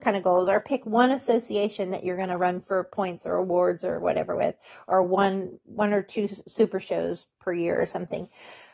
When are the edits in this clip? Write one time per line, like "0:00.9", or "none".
none